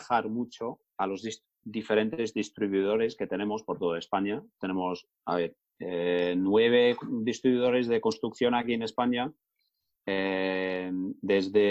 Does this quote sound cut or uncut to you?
uncut